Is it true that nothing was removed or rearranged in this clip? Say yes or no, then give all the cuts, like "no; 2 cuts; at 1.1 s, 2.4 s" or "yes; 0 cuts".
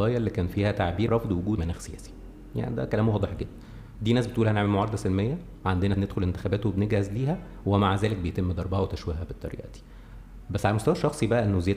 no; 3 cuts; at 1.1 s, 1.6 s, 5.9 s